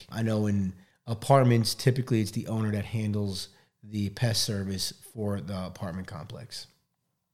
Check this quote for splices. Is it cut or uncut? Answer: uncut